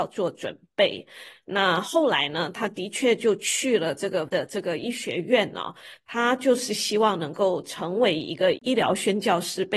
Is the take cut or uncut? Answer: cut